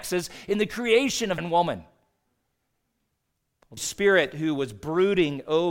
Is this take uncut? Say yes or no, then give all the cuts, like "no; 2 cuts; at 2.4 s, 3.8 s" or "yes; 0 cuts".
no; 2 cuts; at 1.4 s, 3.8 s